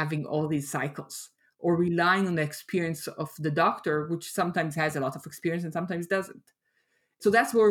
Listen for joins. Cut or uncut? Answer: uncut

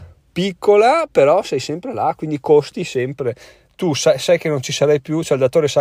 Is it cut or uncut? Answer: uncut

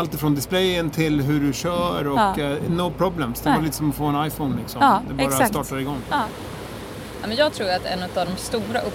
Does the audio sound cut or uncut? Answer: uncut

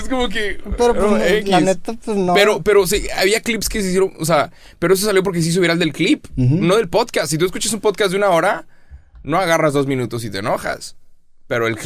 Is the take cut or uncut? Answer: uncut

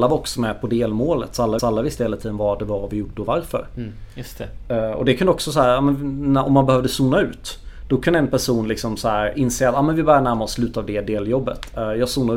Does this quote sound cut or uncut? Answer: cut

